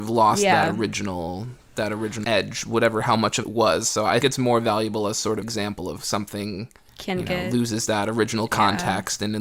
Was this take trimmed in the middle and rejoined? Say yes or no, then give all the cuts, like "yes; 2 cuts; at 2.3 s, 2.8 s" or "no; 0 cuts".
yes; 6 cuts; at 2.2 s, 3.4 s, 4.2 s, 5.4 s, 6.0 s, 6.9 s